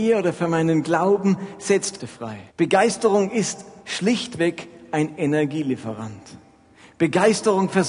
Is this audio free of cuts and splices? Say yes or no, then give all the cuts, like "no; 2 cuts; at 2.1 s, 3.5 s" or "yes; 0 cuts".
no; 3 cuts; at 2.0 s, 2.5 s, 3.8 s